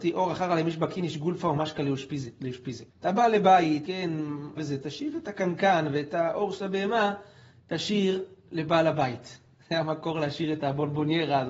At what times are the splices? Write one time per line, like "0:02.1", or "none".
0:02.9
0:03.9
0:04.6